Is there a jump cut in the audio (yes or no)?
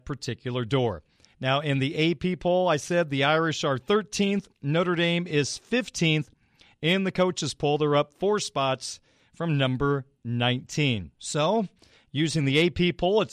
yes